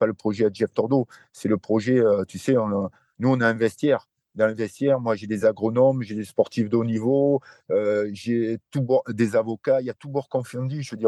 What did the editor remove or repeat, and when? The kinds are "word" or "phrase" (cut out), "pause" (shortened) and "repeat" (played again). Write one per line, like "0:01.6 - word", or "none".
none